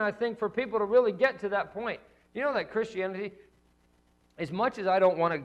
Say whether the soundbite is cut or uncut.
uncut